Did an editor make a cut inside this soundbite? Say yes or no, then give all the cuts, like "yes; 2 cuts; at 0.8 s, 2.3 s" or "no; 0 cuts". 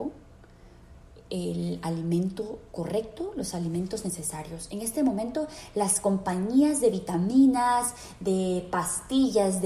no; 0 cuts